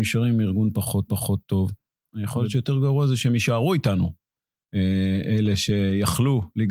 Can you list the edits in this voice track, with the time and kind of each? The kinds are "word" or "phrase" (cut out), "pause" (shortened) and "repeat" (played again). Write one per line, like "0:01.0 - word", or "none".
0:01.1 - repeat